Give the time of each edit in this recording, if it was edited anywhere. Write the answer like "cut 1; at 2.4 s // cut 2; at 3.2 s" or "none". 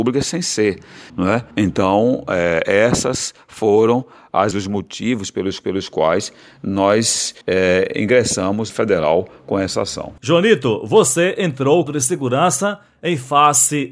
cut 1; at 1.1 s // cut 2; at 1.5 s // cut 3; at 4.5 s // cut 4; at 5.6 s // cut 5; at 7.4 s // cut 6; at 8.7 s // cut 7; at 10.2 s // cut 8; at 11.9 s